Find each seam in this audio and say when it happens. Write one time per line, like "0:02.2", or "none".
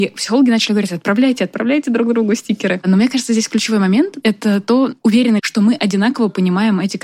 0:05.4